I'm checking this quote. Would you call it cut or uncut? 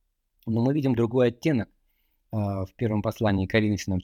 uncut